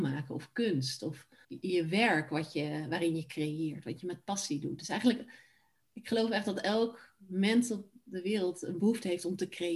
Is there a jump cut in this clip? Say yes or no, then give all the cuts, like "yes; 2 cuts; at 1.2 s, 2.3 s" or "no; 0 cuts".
yes; 1 cut; at 1.4 s